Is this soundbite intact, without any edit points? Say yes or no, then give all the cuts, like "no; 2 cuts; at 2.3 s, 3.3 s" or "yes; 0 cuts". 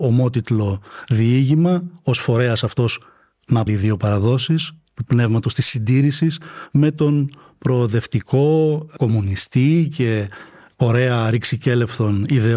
no; 1 cut; at 3.7 s